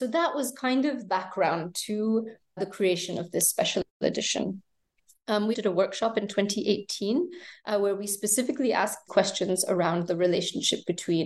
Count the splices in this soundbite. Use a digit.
4